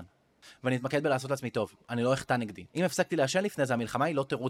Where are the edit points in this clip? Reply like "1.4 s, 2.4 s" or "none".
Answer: 2.7 s